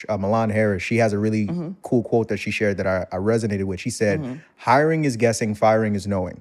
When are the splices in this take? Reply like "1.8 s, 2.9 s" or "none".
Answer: none